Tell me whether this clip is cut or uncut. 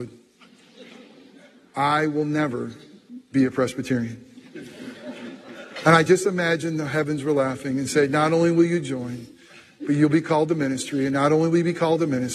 uncut